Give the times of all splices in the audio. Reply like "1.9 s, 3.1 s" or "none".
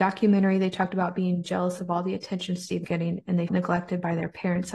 2.8 s, 3.5 s